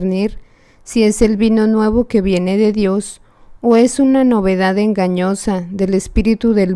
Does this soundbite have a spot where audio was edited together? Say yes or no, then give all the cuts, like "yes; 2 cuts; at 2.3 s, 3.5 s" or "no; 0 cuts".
no; 0 cuts